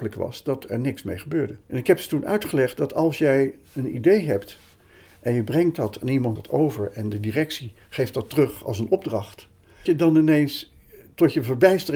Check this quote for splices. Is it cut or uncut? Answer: cut